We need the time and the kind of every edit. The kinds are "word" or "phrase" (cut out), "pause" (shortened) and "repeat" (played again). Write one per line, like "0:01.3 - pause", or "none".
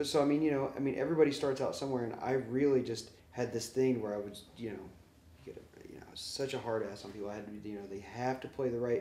0:03.2 - pause